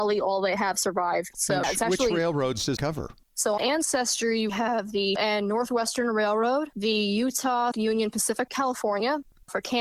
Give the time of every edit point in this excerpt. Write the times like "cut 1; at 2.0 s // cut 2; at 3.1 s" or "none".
cut 1; at 1.6 s // cut 2; at 2.8 s // cut 3; at 3.6 s // cut 4; at 4.5 s // cut 5; at 5.2 s // cut 6; at 7.7 s // cut 7; at 8.5 s